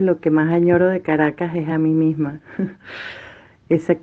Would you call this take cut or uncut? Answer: uncut